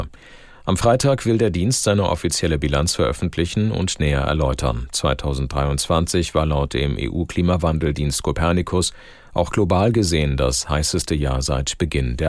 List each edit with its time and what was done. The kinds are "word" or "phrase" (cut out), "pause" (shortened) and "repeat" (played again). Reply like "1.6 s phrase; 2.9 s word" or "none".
none